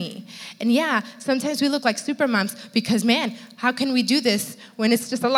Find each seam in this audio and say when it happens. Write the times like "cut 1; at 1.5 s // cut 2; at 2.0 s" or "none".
none